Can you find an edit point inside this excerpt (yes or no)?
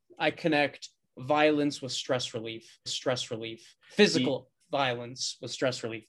yes